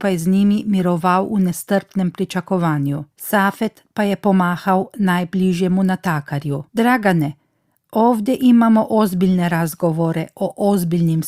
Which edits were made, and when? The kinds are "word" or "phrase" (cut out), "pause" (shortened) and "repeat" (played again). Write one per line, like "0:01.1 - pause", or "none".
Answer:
0:03.1 - pause
0:06.7 - pause

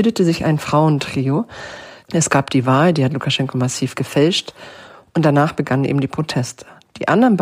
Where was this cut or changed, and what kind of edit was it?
none

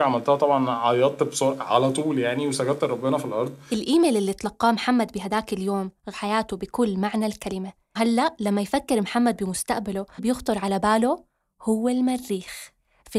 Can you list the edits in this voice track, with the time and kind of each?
0:06.1 - phrase
0:08.0 - word
0:10.2 - phrase

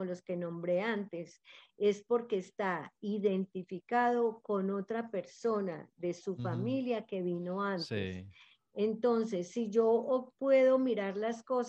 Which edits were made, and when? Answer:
none

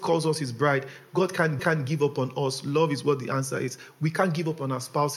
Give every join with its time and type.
0:01.6 - repeat

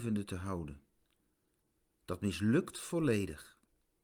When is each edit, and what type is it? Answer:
none

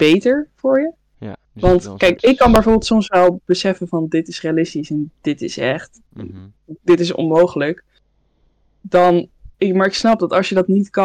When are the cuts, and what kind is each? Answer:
0:01.4 - pause
0:06.8 - pause
0:09.5 - pause

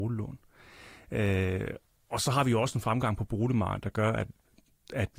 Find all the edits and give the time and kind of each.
none

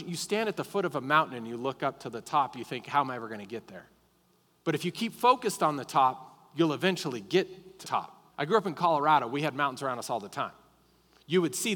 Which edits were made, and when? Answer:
0:04.0 - pause
0:07.8 - word
0:08.3 - pause

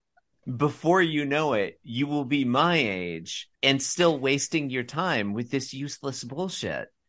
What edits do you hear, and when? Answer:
0:03.5 - pause

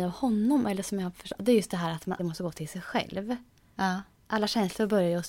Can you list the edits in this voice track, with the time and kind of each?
0:02.2 - word

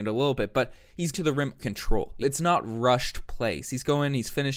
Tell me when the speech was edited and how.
0:01.1 - word
0:01.6 - word
0:02.2 - word

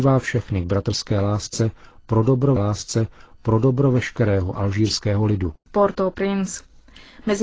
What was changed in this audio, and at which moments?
0:02.6 - repeat
0:05.6 - pause

